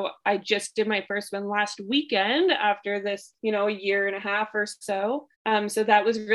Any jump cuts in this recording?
yes; 2 cuts; at 3.4 s, 5.3 s

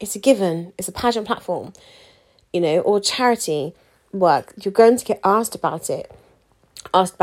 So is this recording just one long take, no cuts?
yes; 0 cuts

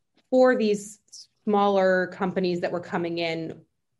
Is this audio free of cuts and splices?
yes; 0 cuts

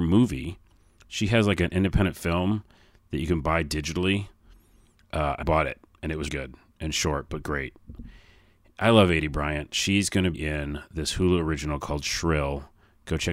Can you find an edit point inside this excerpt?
yes; 3 cuts; at 5.4 s, 6.3 s, 10.3 s

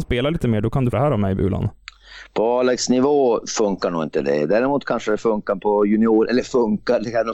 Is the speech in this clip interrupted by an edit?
yes; 1 cut; at 0.9 s

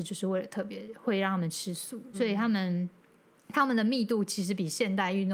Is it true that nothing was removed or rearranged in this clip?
no; 1 cut; at 2.1 s

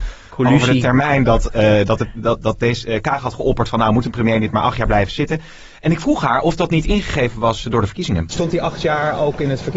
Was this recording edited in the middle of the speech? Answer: no; 0 cuts

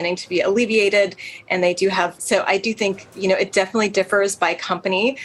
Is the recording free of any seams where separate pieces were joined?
no; 1 cut; at 2.2 s

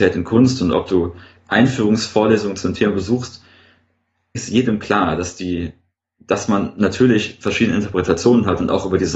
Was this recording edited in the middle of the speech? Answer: yes; 2 cuts; at 1.4 s, 4.3 s

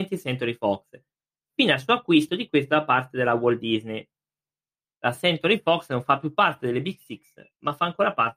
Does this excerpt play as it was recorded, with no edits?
yes; 0 cuts

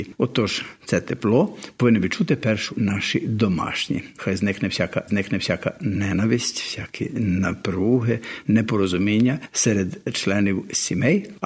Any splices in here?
yes; 3 cuts; at 2.7 s, 4.2 s, 5.1 s

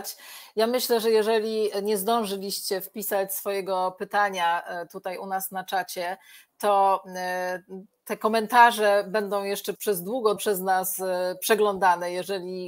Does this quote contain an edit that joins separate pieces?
yes; 2 cuts; at 9.8 s, 10.4 s

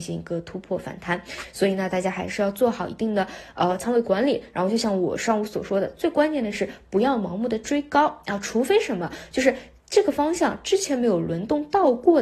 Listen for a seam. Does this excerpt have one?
no; 0 cuts

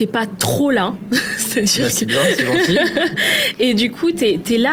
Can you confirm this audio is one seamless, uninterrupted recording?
yes; 0 cuts

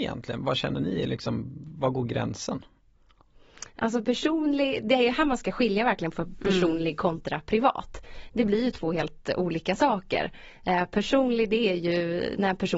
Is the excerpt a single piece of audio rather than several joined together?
yes; 0 cuts

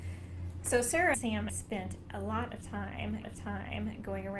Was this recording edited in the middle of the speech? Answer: yes; 3 cuts; at 1.1 s, 1.5 s, 3.2 s

